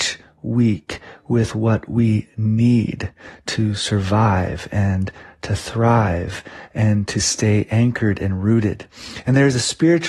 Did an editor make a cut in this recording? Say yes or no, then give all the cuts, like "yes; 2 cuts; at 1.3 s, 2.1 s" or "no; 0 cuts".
no; 0 cuts